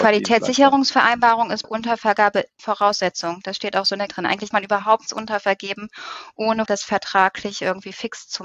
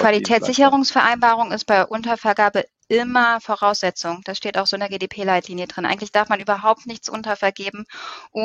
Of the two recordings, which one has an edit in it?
first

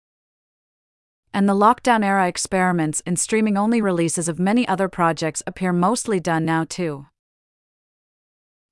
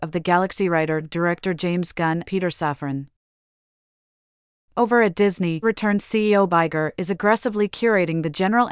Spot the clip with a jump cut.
second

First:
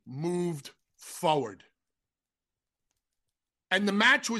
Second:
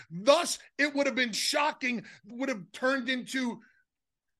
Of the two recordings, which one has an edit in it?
second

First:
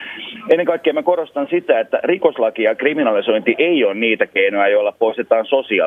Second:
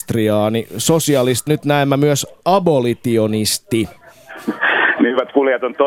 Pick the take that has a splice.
second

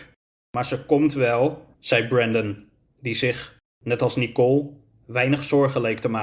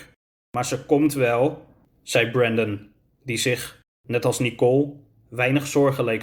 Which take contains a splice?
first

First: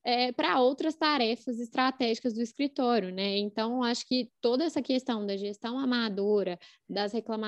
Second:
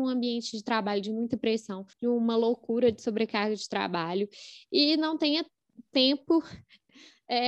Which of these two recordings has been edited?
second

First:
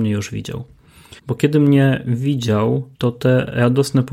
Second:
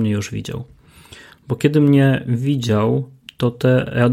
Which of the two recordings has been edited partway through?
first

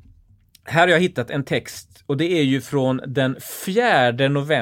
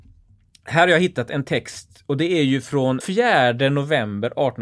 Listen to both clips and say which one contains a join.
second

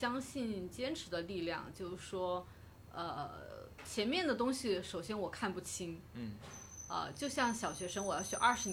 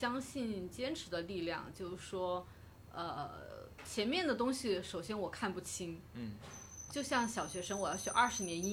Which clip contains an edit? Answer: second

